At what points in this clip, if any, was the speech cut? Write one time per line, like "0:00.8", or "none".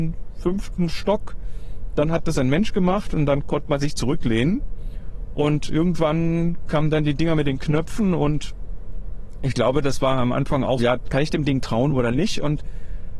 0:10.8